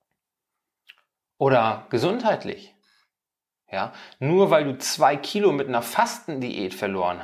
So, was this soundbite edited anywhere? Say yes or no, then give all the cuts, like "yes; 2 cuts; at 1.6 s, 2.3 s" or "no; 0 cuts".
no; 0 cuts